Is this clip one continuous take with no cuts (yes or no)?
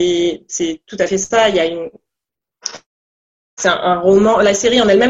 yes